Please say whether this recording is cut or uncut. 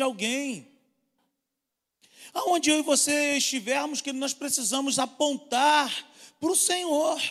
uncut